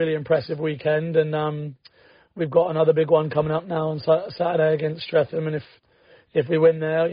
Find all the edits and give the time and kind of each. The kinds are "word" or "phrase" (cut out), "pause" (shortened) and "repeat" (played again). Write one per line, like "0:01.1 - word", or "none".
none